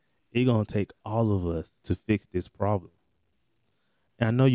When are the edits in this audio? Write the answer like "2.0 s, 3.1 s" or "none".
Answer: 1.8 s